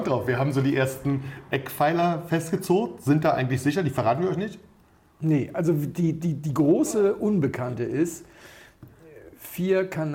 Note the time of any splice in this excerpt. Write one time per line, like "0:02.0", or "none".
none